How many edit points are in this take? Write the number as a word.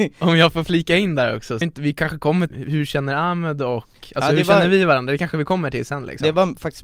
two